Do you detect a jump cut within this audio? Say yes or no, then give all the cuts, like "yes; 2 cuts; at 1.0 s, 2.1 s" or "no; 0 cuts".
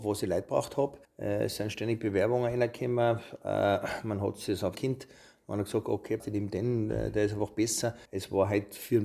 yes; 4 cuts; at 1.0 s, 4.7 s, 6.2 s, 8.1 s